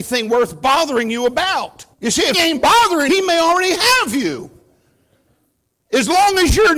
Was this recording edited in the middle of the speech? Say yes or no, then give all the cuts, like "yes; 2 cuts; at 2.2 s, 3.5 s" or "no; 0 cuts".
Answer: yes; 3 cuts; at 1.9 s, 2.3 s, 3.1 s